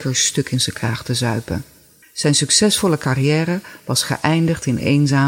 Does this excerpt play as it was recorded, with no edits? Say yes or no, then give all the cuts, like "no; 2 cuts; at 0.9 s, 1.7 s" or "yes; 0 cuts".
no; 1 cut; at 2.0 s